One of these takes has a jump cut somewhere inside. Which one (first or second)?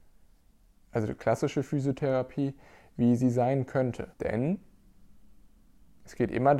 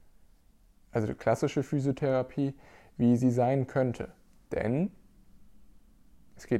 first